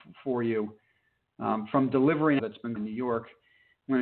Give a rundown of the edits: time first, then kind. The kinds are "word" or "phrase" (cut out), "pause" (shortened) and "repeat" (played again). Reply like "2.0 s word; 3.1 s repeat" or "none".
2.4 s word; 2.8 s phrase